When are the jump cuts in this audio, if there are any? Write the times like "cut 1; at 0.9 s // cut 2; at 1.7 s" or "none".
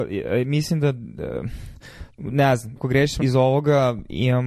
cut 1; at 2.1 s // cut 2; at 2.8 s // cut 3; at 3.2 s